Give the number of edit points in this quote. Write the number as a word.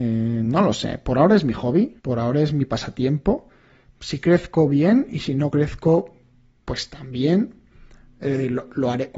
one